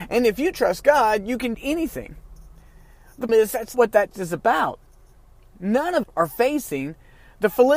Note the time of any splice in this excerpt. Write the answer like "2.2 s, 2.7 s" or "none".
1.5 s, 3.3 s, 3.7 s, 4.1 s, 6.0 s